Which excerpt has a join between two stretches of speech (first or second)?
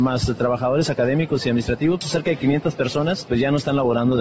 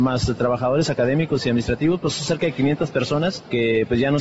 first